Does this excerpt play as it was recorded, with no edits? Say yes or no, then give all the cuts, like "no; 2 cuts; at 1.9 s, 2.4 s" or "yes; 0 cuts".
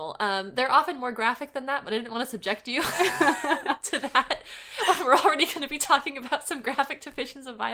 yes; 0 cuts